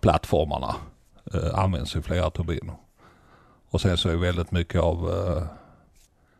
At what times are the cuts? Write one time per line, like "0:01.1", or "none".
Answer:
none